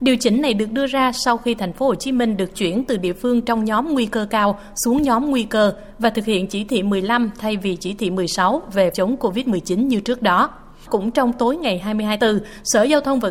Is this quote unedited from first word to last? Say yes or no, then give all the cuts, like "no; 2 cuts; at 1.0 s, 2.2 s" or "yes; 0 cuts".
no; 2 cuts; at 8.9 s, 12.2 s